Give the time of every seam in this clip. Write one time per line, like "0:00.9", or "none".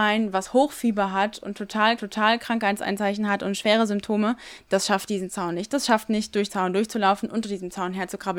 0:02.0
0:06.5

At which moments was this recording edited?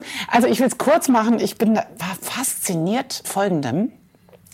0:03.2

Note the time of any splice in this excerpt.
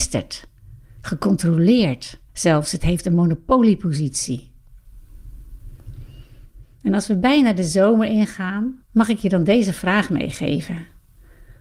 0:02.3
0:08.8

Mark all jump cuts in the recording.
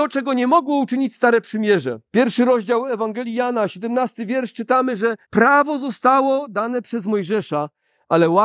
0:02.1
0:05.2

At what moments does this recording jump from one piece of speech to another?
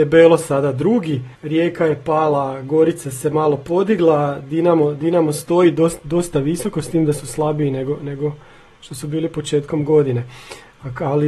0:01.3

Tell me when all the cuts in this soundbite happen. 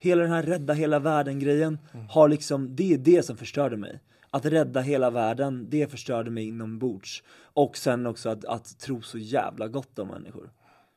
none

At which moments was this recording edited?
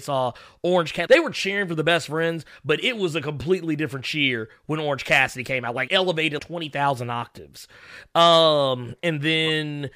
0:01.1
0:05.9
0:06.4

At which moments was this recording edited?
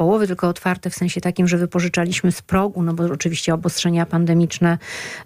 none

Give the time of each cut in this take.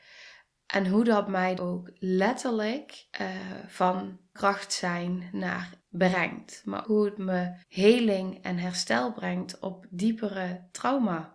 0:01.6
0:03.1
0:04.4
0:05.8
0:06.8
0:07.6

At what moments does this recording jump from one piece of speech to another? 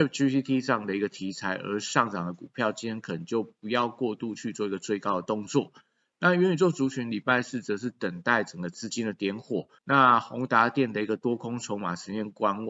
0:09.8

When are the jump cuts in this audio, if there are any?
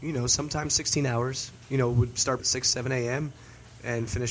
0:02.4

